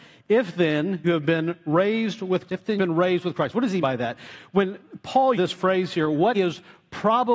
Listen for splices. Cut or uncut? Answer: cut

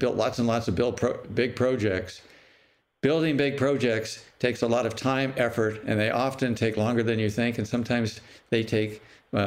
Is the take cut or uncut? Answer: uncut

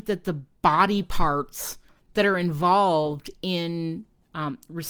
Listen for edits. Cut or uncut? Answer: cut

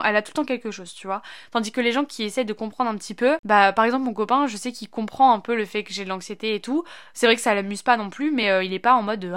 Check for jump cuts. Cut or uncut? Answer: uncut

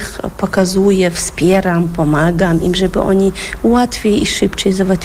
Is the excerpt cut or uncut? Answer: uncut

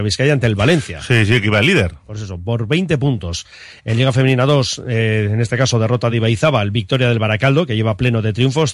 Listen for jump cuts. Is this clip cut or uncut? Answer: uncut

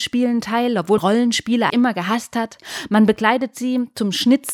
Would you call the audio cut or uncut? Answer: cut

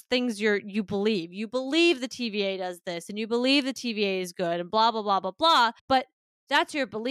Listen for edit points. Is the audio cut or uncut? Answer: cut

